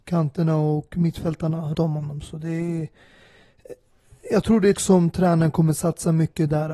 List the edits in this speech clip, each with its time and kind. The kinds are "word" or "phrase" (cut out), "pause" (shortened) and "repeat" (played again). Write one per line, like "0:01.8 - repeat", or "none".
0:01.7 - word
0:04.8 - word